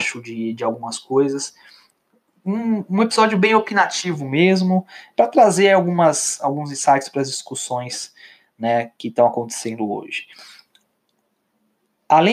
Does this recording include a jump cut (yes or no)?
no